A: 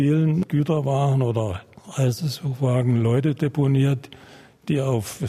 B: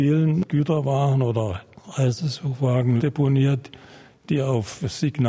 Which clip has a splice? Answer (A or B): B